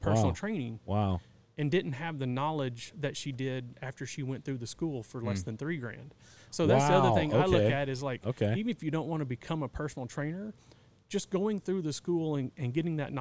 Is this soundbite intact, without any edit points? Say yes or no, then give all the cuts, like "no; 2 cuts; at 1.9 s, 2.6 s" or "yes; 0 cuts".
yes; 0 cuts